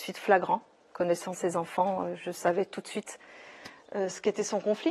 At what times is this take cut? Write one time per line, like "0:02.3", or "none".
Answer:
none